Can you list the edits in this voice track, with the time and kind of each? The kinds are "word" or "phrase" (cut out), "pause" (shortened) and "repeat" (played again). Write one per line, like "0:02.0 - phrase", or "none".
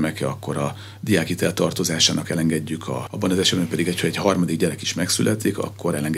0:03.1 - word